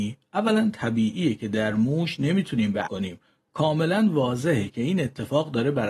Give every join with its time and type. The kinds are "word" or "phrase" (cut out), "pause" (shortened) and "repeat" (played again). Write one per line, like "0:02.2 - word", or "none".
0:02.8 - phrase